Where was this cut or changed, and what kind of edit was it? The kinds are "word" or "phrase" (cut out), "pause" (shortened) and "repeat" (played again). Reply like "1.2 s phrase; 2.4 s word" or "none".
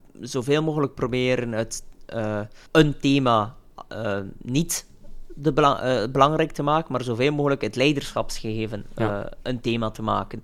2.7 s pause